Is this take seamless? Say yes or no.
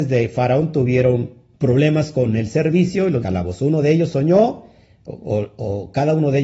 no